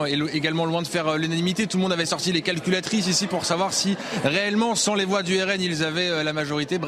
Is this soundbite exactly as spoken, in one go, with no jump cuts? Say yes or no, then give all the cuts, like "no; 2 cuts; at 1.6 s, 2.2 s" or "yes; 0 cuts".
yes; 0 cuts